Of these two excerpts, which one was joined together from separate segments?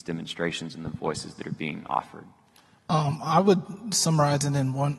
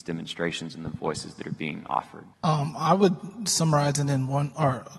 second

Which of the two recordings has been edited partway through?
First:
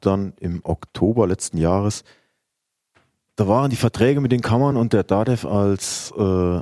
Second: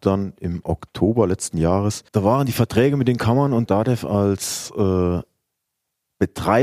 second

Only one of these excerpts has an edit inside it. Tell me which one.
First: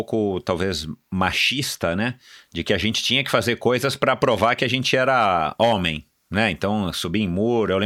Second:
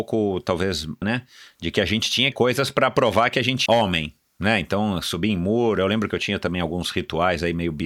second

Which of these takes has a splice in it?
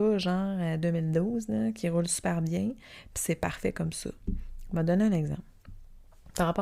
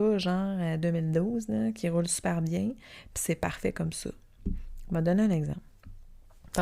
first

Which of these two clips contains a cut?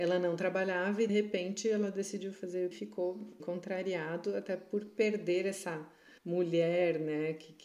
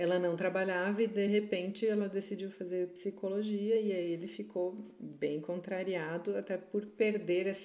first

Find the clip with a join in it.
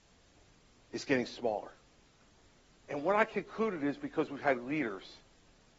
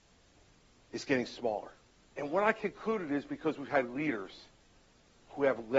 second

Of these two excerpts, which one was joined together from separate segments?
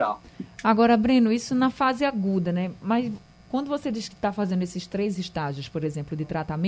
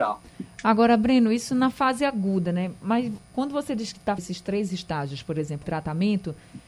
second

